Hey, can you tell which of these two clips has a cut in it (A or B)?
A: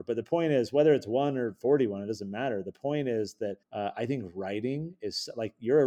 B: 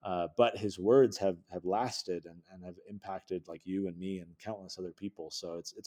A